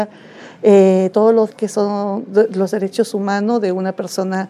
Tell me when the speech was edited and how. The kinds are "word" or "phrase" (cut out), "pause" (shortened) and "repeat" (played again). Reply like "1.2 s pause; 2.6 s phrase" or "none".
1.1 s phrase; 1.5 s word